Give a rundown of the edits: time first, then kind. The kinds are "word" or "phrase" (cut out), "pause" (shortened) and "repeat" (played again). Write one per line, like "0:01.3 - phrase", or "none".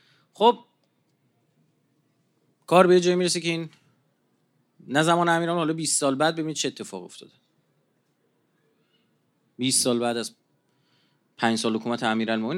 none